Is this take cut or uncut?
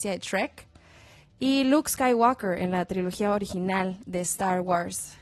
uncut